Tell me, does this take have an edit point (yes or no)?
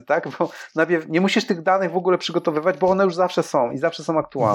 no